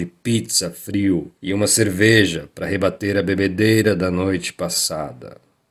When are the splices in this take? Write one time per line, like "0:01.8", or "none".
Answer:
0:01.4